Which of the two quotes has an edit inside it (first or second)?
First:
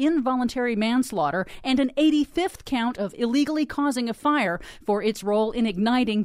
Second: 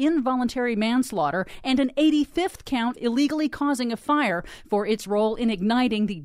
second